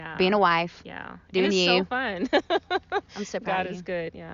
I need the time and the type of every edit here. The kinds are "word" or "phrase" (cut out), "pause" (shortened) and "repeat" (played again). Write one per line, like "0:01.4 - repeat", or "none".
none